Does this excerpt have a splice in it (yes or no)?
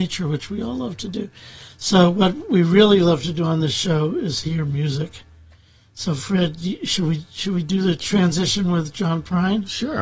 no